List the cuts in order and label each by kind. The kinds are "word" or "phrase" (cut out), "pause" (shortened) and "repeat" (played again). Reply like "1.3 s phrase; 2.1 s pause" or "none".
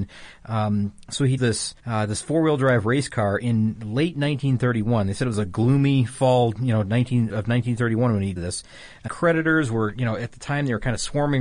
1.4 s word; 1.8 s pause; 7.3 s word; 8.4 s word; 9.1 s word